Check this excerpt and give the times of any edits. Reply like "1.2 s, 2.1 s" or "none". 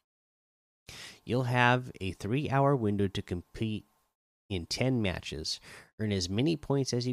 none